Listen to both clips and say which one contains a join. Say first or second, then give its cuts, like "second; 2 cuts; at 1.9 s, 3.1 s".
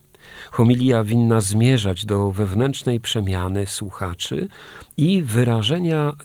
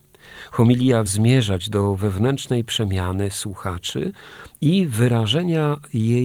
second; 1 cut; at 1.1 s